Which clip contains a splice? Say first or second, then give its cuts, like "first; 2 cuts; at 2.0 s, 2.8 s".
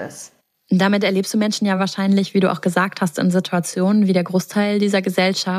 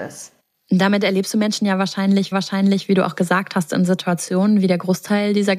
second; 1 cut; at 2.3 s